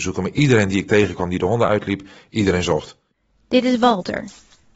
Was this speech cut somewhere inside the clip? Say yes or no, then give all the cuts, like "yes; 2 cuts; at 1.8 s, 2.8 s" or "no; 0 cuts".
no; 0 cuts